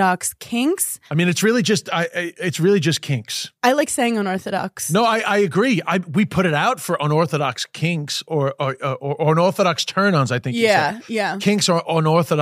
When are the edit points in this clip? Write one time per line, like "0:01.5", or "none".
0:01.1
0:03.6